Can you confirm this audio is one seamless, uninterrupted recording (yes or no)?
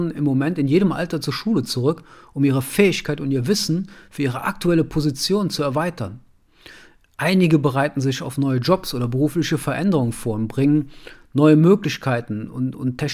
yes